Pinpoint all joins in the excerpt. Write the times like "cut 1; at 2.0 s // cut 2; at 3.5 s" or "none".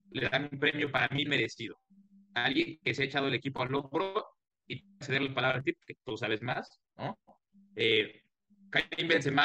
cut 1; at 1.3 s